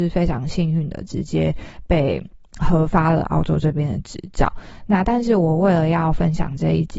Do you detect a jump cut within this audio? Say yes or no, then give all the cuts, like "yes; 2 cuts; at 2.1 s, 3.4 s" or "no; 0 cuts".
no; 0 cuts